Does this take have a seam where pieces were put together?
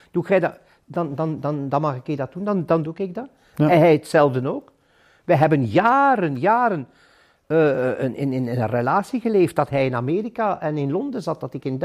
no; 0 cuts

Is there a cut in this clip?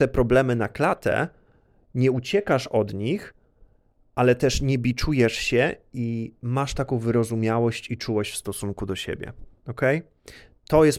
no; 0 cuts

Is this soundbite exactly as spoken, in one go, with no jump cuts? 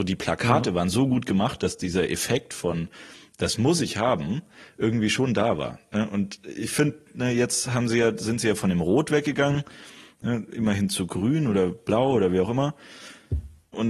yes; 0 cuts

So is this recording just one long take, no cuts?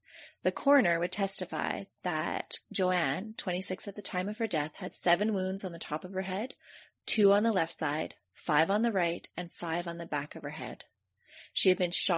yes; 0 cuts

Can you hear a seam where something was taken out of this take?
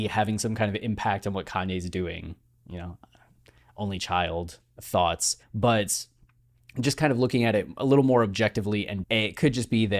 yes; 2 cuts; at 5.4 s, 9.0 s

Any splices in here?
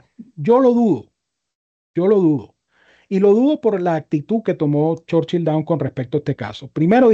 no; 0 cuts

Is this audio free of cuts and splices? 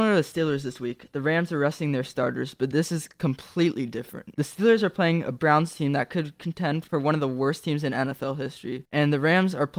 yes; 0 cuts

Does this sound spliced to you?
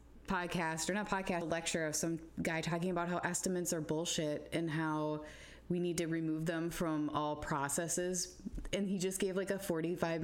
yes; 1 cut; at 1.4 s

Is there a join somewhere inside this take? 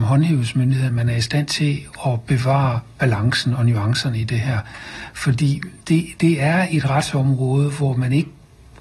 no; 0 cuts

